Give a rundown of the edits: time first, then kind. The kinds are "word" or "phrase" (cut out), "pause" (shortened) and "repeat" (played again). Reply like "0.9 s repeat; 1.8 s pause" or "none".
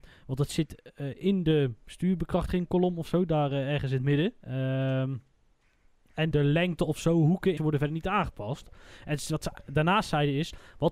4.4 s pause; 6.3 s word; 7.6 s phrase